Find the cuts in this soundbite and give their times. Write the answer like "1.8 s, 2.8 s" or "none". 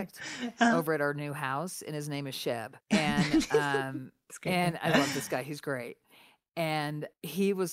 2.8 s